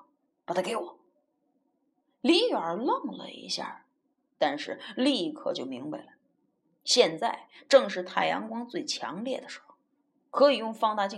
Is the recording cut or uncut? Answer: uncut